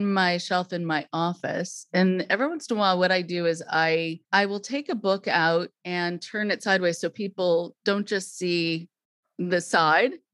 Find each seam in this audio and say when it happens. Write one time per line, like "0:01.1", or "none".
0:04.2